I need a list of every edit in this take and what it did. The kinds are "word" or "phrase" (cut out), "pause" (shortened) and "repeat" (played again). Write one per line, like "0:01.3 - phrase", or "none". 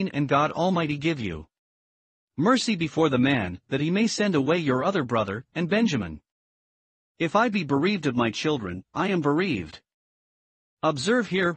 none